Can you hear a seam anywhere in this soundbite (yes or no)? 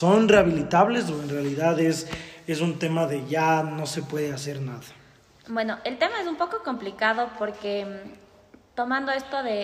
no